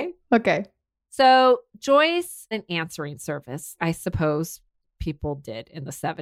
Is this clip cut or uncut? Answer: cut